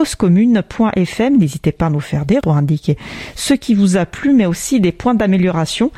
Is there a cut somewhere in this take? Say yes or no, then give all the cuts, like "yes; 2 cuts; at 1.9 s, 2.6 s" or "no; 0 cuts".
yes; 1 cut; at 2.4 s